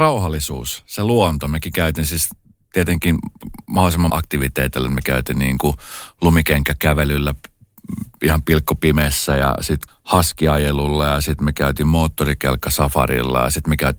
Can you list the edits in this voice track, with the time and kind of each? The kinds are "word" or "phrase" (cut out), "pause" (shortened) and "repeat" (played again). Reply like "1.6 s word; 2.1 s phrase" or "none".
4.1 s word; 9.9 s word